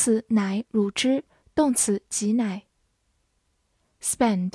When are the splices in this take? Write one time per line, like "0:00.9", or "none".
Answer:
none